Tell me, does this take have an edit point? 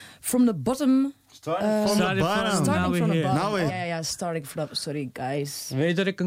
yes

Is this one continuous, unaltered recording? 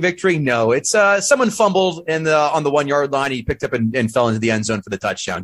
yes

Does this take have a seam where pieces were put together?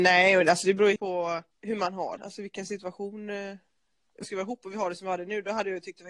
yes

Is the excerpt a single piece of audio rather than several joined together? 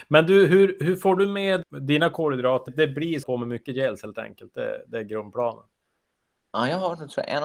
no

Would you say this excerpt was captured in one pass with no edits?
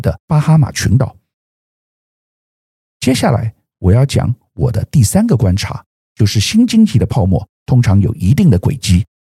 no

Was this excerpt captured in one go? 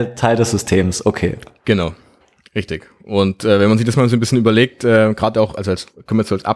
no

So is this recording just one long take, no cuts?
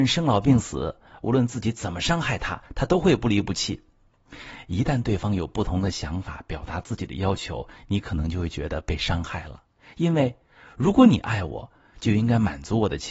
yes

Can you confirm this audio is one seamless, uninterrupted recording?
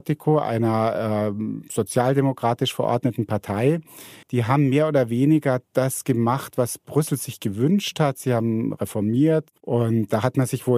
no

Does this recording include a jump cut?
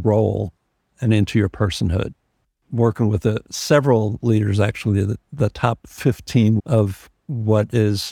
yes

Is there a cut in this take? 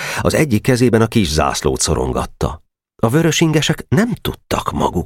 no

